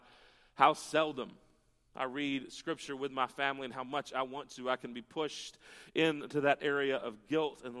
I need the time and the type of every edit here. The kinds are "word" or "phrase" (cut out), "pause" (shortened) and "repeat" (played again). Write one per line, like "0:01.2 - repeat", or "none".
none